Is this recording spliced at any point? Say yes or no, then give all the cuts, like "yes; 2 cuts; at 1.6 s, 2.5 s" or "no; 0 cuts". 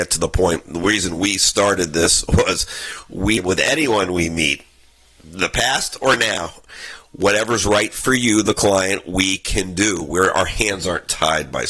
yes; 1 cut; at 3.4 s